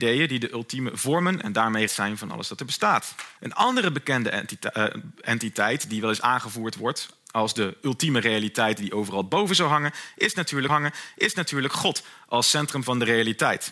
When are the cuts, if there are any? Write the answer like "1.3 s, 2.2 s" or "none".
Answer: 1.9 s, 3.4 s, 10.7 s